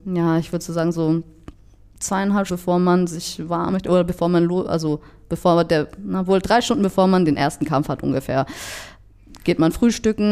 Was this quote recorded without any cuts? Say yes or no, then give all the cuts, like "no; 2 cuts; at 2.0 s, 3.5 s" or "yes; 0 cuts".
no; 2 cuts; at 2.5 s, 3.7 s